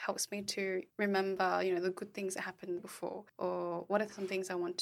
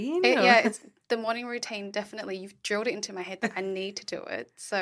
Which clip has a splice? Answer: first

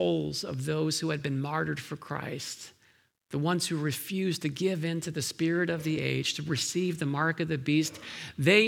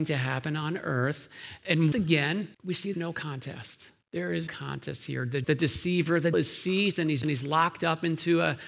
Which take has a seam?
second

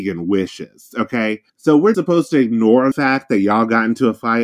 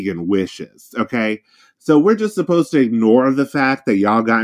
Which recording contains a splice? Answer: first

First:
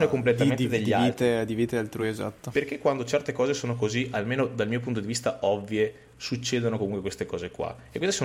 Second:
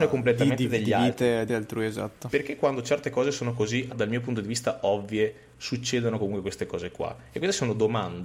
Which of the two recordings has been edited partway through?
second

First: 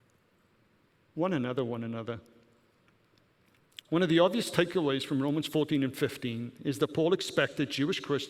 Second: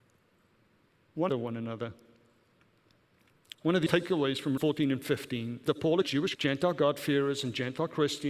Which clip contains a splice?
second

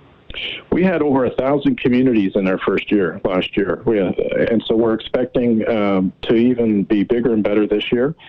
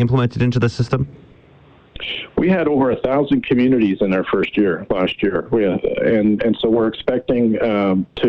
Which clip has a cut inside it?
first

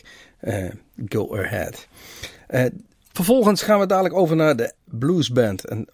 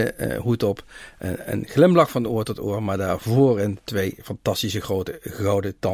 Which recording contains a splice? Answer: first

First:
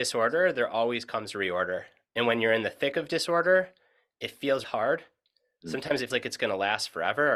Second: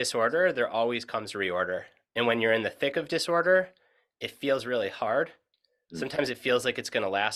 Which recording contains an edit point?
first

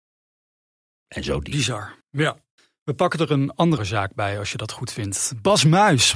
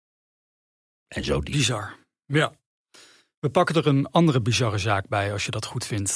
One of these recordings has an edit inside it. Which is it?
first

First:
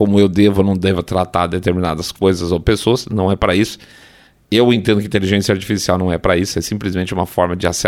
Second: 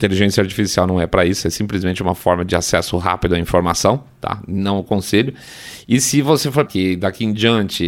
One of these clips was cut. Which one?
second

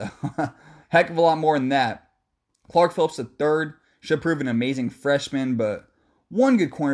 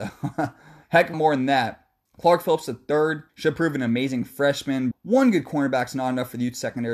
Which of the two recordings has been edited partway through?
second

